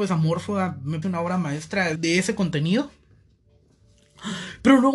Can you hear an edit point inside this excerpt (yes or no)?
yes